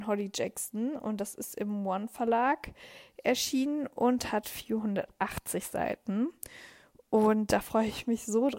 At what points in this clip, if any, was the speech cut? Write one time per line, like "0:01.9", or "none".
none

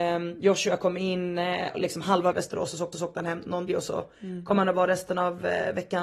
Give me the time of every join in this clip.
0:01.7
0:02.3
0:02.9
0:03.7

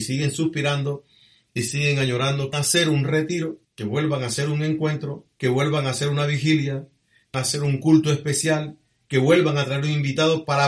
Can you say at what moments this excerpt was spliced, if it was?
0:02.5
0:03.6
0:05.3
0:07.3

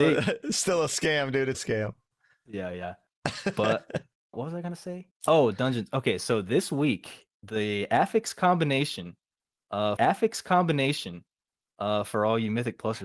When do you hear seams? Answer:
0:01.5
0:04.3
0:05.2
0:10.0

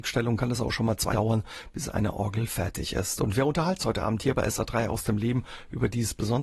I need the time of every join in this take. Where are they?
0:01.1
0:03.8

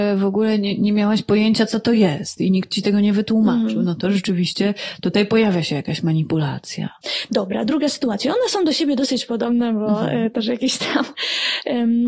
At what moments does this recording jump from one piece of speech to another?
none

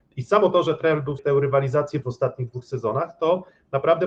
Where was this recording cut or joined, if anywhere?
0:01.2
0:02.0

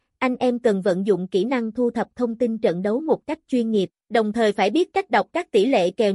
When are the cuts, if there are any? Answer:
0:04.0

